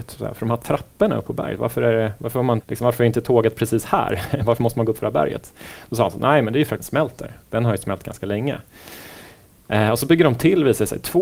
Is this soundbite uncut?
no; 2 cuts; at 2.6 s, 6.8 s

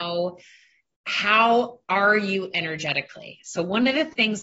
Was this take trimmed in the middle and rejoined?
no; 0 cuts

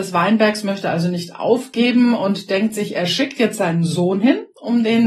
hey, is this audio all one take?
yes; 0 cuts

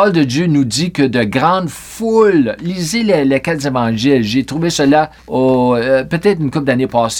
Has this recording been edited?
yes; 1 cut; at 5.2 s

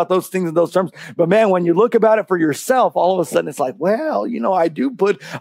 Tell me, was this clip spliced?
no; 0 cuts

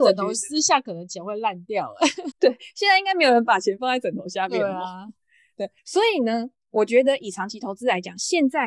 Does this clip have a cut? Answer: yes; 2 cuts; at 2.3 s, 5.8 s

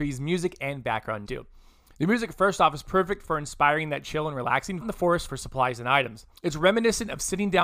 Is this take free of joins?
no; 4 cuts; at 1.2 s, 4.8 s, 5.3 s, 6.4 s

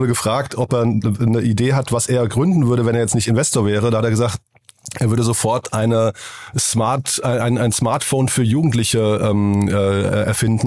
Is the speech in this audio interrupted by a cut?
no; 0 cuts

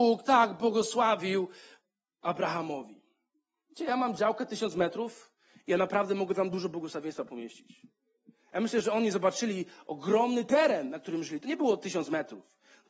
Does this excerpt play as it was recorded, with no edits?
yes; 0 cuts

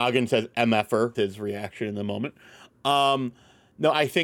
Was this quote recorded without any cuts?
no; 1 cut; at 1.1 s

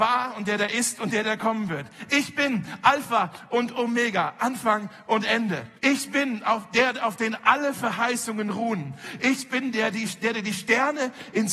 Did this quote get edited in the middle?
yes; 1 cut; at 5.7 s

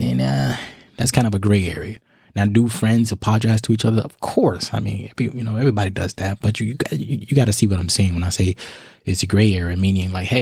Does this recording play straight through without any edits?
yes; 0 cuts

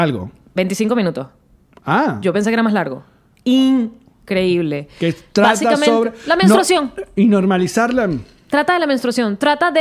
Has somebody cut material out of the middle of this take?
no; 0 cuts

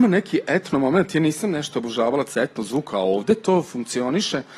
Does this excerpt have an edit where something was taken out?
no; 0 cuts

